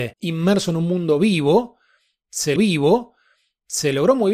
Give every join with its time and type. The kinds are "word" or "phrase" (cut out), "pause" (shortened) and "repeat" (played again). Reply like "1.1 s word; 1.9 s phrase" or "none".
2.6 s repeat